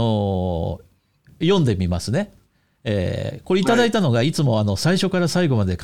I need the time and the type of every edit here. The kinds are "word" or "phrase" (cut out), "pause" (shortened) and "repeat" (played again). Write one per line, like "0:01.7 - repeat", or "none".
none